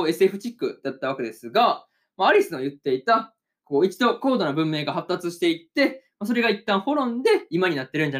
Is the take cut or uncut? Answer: uncut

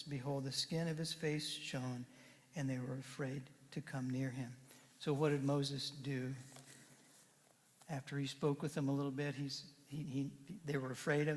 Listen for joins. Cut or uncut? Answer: uncut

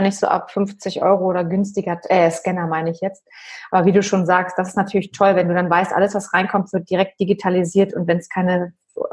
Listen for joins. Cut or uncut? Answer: uncut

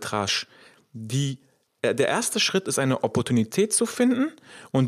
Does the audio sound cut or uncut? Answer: uncut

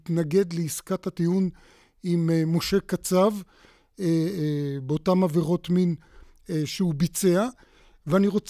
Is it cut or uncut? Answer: uncut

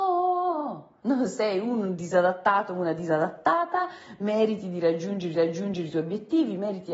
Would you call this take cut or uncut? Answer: cut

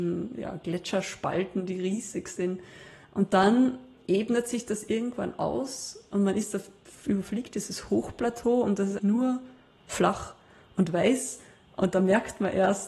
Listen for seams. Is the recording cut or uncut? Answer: cut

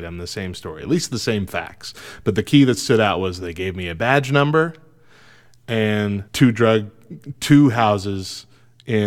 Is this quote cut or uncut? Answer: cut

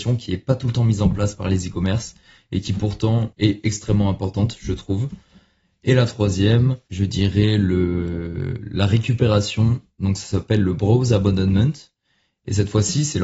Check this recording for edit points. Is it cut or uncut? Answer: uncut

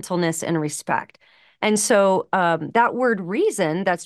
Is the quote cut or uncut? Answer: uncut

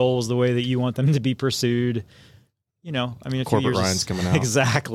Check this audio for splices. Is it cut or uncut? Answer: uncut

